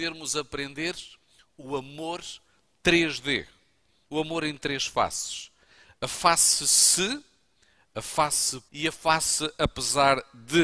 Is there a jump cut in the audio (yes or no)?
yes